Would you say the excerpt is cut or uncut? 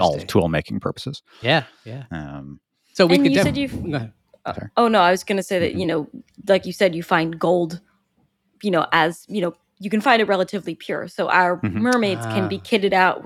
uncut